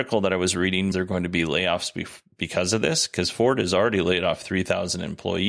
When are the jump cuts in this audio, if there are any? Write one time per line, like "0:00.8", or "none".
0:00.9